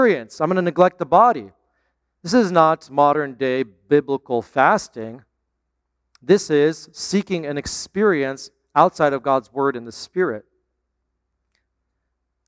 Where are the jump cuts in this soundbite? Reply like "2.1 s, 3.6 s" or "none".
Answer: none